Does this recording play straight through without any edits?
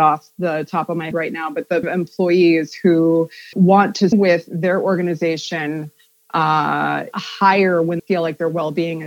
no; 6 cuts; at 1.1 s, 1.8 s, 3.5 s, 4.1 s, 7.1 s, 8.0 s

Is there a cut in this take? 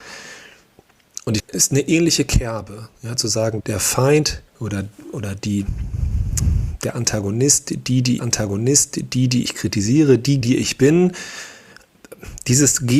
yes; 5 cuts; at 1.4 s, 3.6 s, 4.5 s, 8.2 s, 10.4 s

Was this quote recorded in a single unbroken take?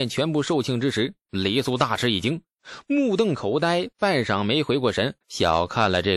no; 1 cut; at 5.2 s

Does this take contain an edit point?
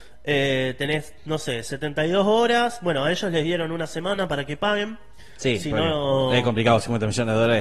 no; 0 cuts

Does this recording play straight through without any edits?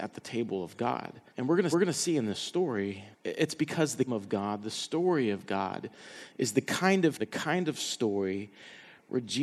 no; 5 cuts; at 1.3 s, 1.7 s, 3.1 s, 4.1 s, 7.2 s

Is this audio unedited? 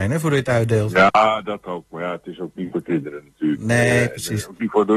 yes; 0 cuts

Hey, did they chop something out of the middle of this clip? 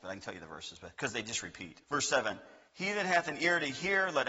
yes; 3 cuts; at 0.9 s, 1.8 s, 2.7 s

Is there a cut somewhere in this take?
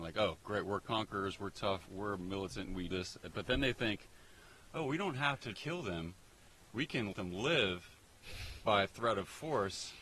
yes; 5 cuts; at 1.9 s, 2.9 s, 5.5 s, 7.1 s, 8.6 s

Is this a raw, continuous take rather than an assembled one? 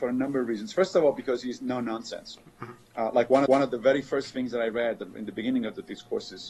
no; 1 cut; at 3.5 s

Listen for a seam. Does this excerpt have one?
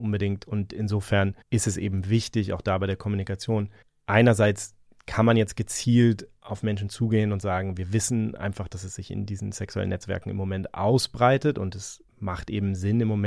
yes; 3 cuts; at 1.4 s, 3.8 s, 12.1 s

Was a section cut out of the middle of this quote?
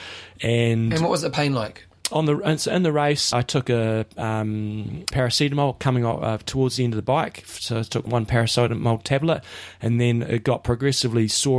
yes; 3 cuts; at 3.3 s, 5.1 s, 8.1 s

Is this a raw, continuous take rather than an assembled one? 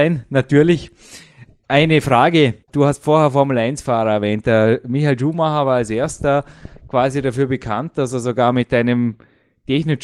no; 1 cut; at 2.6 s

